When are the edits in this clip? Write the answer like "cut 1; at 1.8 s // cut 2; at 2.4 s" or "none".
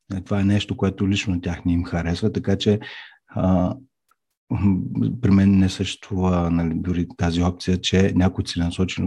none